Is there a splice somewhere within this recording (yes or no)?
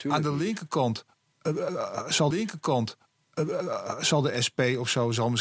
yes